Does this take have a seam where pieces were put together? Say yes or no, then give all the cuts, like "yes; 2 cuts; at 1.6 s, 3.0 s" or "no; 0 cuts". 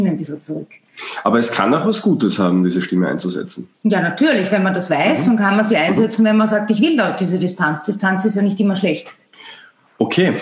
yes; 1 cut; at 3.7 s